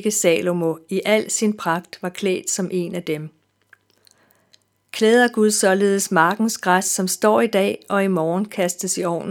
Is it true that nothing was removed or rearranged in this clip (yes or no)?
yes